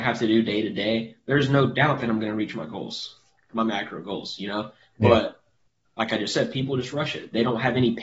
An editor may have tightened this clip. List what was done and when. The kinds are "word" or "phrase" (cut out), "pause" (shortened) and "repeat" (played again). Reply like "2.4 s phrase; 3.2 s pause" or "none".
none